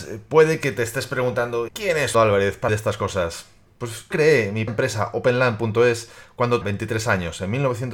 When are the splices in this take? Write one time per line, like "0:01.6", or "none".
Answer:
0:01.7
0:02.1
0:02.7
0:04.1
0:04.7
0:06.6